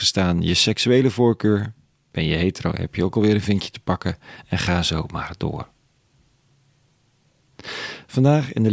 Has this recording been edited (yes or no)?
no